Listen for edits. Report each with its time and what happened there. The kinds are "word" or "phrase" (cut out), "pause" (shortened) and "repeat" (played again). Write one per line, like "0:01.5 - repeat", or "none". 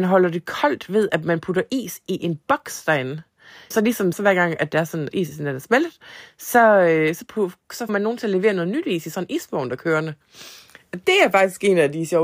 0:03.7 - word
0:04.1 - word
0:05.1 - word
0:07.9 - word
0:09.8 - word

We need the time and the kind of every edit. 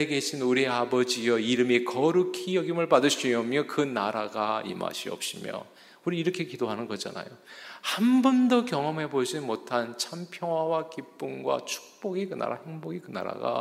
none

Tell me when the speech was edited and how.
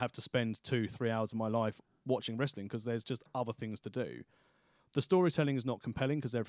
none

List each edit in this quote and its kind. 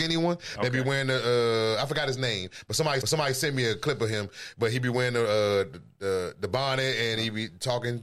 0:03.0 - repeat

